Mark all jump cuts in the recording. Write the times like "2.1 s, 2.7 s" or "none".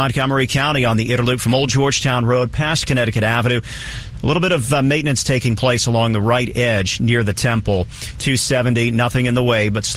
none